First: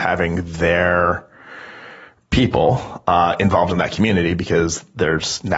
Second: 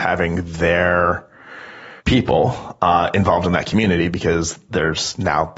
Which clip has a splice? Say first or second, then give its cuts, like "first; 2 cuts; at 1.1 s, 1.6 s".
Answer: second; 1 cut; at 2.0 s